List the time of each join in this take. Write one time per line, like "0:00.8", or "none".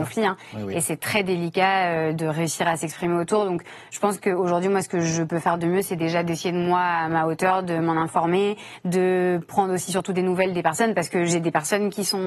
none